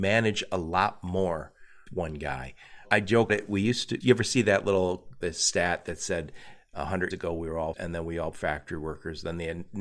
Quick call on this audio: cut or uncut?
cut